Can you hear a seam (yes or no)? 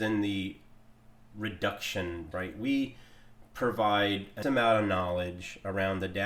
yes